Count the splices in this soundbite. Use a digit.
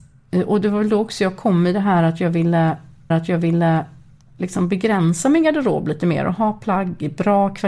1